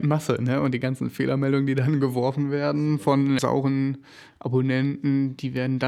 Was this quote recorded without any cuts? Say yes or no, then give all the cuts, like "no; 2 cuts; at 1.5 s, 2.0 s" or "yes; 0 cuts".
no; 1 cut; at 3.4 s